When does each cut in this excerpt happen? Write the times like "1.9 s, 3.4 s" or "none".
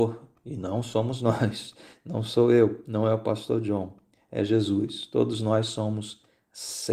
none